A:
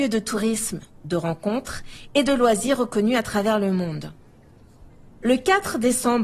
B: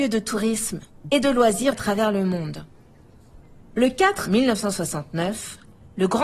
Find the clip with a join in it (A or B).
B